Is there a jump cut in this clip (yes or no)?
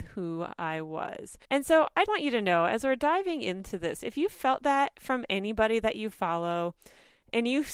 yes